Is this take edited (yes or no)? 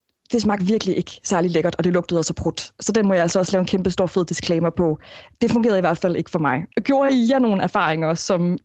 yes